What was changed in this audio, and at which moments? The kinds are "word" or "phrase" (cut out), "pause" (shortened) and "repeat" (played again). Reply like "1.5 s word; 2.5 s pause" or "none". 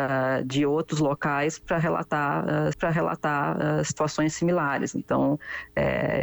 2.7 s repeat

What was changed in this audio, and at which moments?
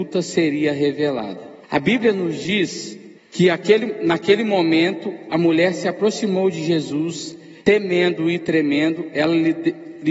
1.6 s pause; 3.2 s pause; 7.6 s pause

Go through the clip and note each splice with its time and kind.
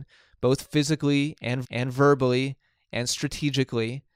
1.6 s repeat

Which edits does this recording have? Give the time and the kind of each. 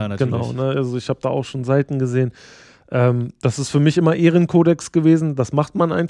none

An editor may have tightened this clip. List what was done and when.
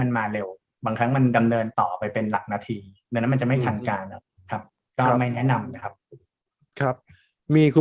none

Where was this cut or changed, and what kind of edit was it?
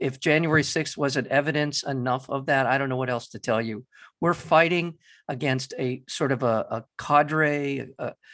none

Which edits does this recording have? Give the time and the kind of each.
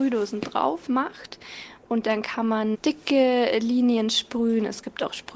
none

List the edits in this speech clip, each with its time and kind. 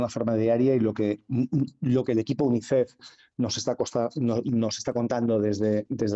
none

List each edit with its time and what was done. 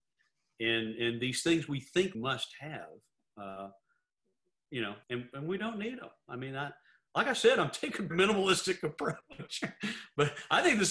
2.1 s word; 5.0 s pause; 8.1 s word

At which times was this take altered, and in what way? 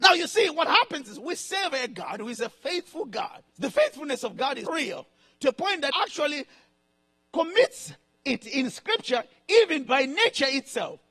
3.5 s pause; 4.7 s word; 5.9 s word

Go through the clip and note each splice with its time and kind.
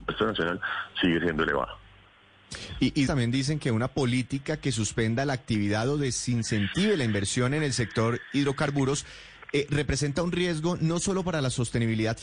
3.1 s phrase

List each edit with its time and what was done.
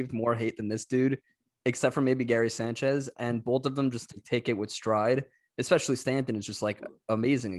none

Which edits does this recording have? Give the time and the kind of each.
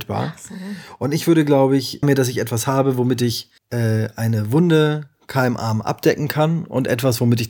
2.0 s phrase; 3.6 s pause

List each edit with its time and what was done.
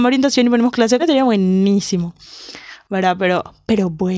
1.0 s word

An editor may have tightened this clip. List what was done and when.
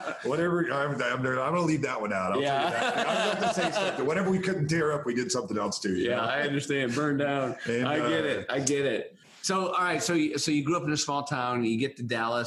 none

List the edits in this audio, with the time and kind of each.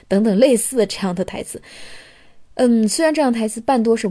none

